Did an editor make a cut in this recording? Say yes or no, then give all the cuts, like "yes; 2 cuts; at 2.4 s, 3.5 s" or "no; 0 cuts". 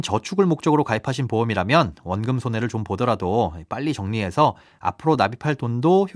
no; 0 cuts